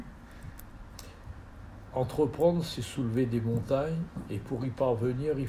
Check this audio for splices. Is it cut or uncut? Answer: uncut